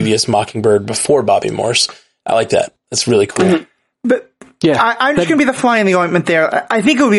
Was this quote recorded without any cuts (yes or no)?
yes